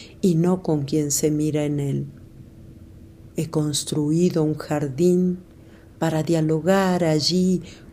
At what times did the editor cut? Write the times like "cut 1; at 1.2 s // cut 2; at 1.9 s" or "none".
none